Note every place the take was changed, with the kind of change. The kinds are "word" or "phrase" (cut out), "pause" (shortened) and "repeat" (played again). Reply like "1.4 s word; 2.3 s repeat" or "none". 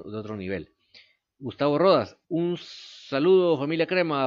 2.2 s pause